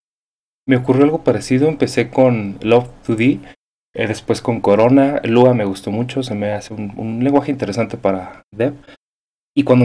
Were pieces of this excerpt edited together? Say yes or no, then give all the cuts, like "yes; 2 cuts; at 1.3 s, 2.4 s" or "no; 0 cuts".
no; 0 cuts